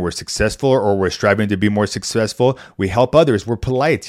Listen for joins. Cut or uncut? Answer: uncut